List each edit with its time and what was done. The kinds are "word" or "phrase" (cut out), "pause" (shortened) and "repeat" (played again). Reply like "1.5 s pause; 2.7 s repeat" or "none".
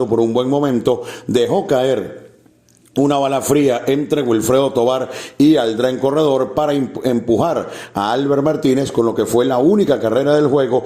none